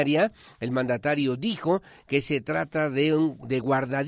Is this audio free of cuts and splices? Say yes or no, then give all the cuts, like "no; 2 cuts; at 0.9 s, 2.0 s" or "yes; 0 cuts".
yes; 0 cuts